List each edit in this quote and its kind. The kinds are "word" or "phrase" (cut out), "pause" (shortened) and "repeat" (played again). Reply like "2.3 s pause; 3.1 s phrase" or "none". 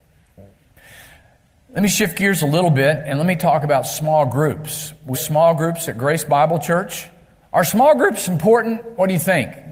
5.1 s word